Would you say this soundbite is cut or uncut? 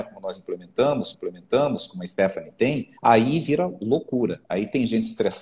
cut